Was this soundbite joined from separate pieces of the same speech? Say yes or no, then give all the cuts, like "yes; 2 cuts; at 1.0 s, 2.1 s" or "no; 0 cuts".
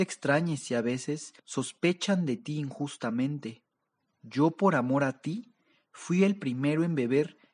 yes; 1 cut; at 1.4 s